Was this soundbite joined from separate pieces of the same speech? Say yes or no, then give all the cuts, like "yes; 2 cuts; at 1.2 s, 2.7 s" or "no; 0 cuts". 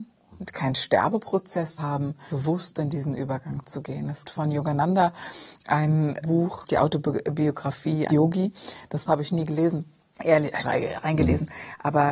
yes; 8 cuts; at 1.8 s, 2.3 s, 4.2 s, 6.2 s, 6.6 s, 8.1 s, 9.1 s, 10.6 s